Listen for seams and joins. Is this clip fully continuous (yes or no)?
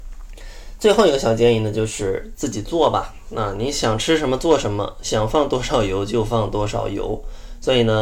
yes